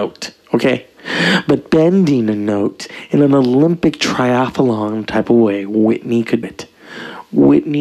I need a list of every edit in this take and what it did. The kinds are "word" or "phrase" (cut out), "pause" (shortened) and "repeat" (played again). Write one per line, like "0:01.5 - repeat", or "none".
0:06.4 - word